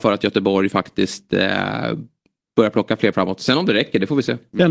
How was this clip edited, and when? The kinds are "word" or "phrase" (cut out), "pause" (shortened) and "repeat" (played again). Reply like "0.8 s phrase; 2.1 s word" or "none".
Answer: 3.1 s word